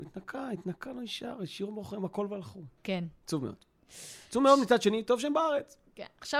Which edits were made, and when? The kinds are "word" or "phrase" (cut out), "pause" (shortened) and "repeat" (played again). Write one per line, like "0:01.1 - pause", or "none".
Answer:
0:02.8 - pause